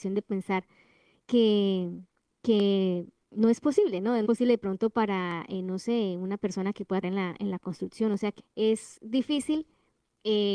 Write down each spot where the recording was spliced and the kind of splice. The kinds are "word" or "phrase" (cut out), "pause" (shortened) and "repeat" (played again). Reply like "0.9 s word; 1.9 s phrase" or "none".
3.2 s pause; 4.2 s word; 7.0 s word; 8.4 s word

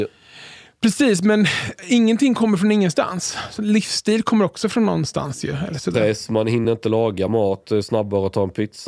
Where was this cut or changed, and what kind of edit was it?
none

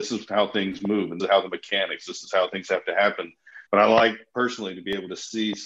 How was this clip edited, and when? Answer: 1.2 s phrase; 3.7 s pause

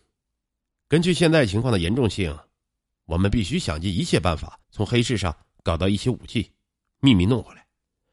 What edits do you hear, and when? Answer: 4.6 s pause

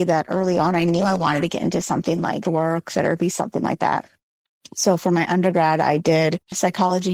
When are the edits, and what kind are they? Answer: 2.4 s phrase

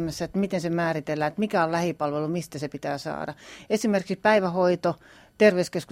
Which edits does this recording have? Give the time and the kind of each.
none

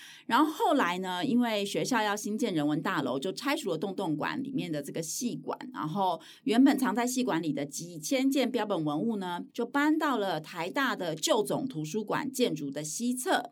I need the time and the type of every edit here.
9.5 s pause

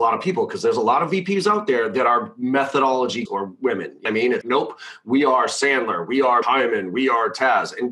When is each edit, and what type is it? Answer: 3.3 s word; 4.1 s phrase; 4.4 s word; 6.4 s word

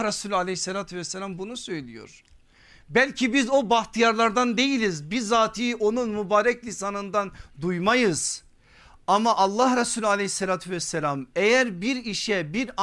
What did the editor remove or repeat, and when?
none

